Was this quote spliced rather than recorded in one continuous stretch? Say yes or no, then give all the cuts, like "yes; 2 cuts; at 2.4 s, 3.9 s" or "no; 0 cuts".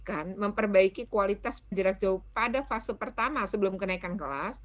yes; 1 cut; at 1.7 s